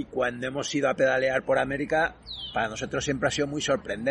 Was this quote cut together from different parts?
no; 0 cuts

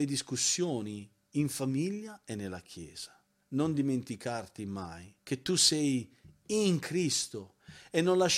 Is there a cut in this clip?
yes; 2 cuts; at 3.3 s, 5.2 s

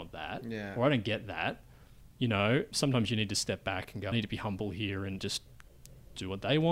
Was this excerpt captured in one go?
no; 3 cuts; at 2.7 s, 4.1 s, 5.2 s

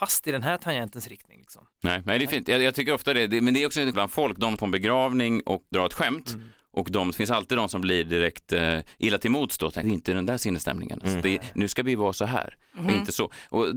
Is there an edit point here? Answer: yes; 5 cuts; at 1.7 s, 3.9 s, 4.6 s, 5.7 s, 9.8 s

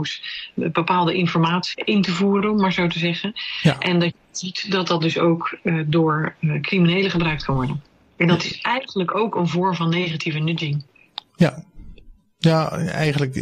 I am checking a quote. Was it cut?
no; 0 cuts

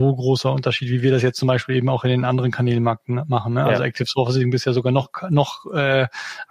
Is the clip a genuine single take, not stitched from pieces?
yes; 0 cuts

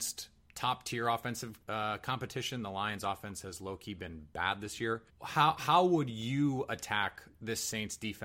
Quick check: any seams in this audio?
yes; 2 cuts; at 1.6 s, 5.1 s

